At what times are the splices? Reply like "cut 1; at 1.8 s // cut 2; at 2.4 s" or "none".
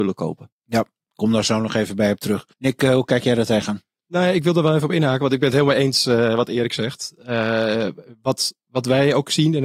cut 1; at 2.5 s // cut 2; at 8.6 s